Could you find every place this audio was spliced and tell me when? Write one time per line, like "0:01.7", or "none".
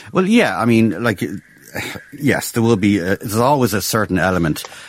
0:02.1